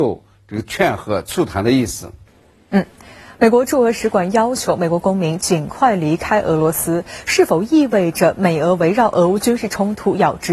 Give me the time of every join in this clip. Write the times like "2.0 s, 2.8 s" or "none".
none